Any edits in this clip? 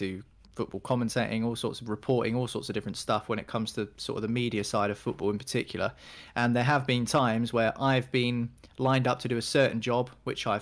no; 0 cuts

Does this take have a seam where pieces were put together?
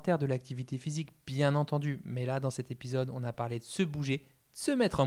no; 0 cuts

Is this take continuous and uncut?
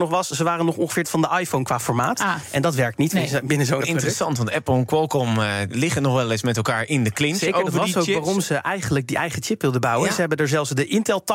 no; 2 cuts; at 1.0 s, 3.8 s

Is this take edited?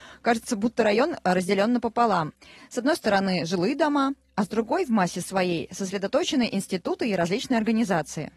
no; 0 cuts

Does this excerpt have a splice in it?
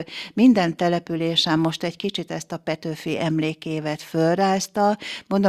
no; 0 cuts

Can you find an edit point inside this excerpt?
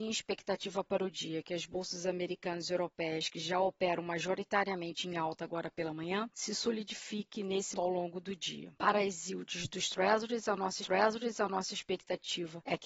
yes; 2 cuts; at 7.7 s, 10.8 s

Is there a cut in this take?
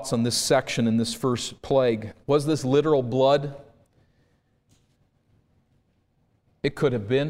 yes; 1 cut; at 2.2 s

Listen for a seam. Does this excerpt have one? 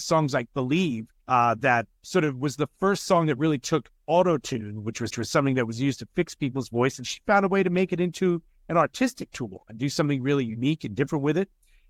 yes; 3 cuts; at 1.2 s, 2.0 s, 5.1 s

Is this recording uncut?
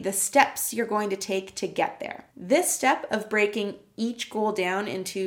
yes; 0 cuts

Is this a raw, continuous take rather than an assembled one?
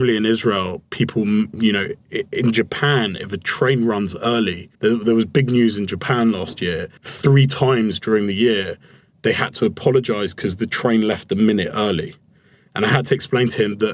no; 2 cuts; at 4.7 s, 7.0 s

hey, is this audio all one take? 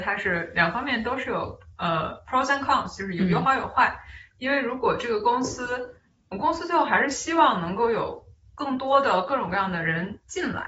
yes; 0 cuts

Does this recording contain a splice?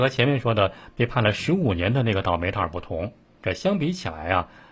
no; 0 cuts

